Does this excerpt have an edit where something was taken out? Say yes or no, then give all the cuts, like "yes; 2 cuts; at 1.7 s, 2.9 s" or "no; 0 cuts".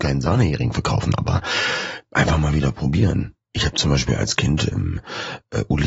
yes; 1 cut; at 4.7 s